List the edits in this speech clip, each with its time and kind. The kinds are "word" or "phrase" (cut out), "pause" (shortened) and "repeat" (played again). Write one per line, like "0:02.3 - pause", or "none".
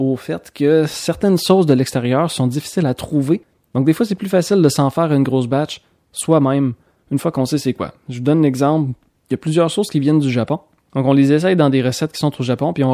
none